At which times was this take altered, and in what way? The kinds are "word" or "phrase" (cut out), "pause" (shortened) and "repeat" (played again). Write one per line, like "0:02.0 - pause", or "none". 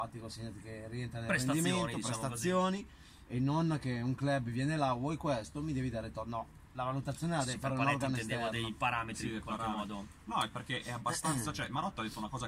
0:10.5 - word